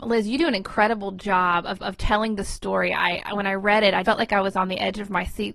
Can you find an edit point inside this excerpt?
yes; 2 cuts; at 1.8 s, 4.0 s

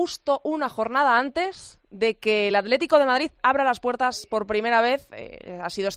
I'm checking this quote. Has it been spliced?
no; 0 cuts

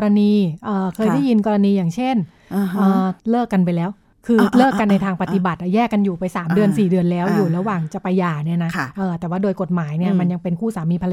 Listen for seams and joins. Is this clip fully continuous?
no; 2 cuts; at 3.2 s, 4.1 s

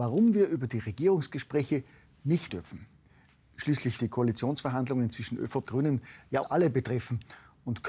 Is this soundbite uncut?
no; 4 cuts; at 2.5 s, 4.0 s, 5.6 s, 6.4 s

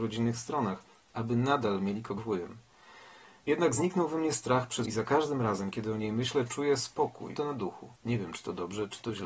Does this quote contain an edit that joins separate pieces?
yes; 4 cuts; at 2.2 s, 4.8 s, 7.4 s, 8.0 s

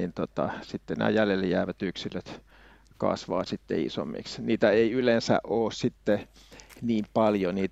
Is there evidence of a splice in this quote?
no; 0 cuts

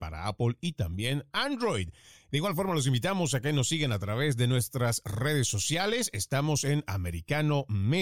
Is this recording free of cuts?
yes; 0 cuts

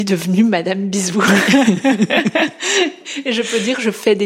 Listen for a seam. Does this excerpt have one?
no; 0 cuts

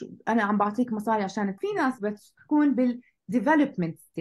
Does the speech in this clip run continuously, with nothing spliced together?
no; 2 cuts; at 1.6 s, 2.0 s

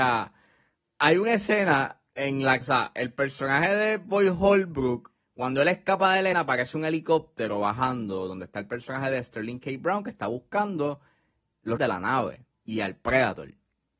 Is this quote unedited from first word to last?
no; 5 cuts; at 2.1 s, 2.6 s, 6.3 s, 11.8 s, 12.5 s

